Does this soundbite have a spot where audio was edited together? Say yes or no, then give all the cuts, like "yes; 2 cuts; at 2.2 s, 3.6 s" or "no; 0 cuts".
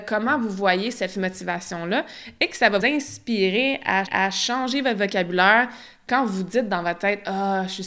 yes; 3 cuts; at 1.1 s, 2.8 s, 4.1 s